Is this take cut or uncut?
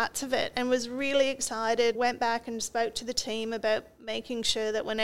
cut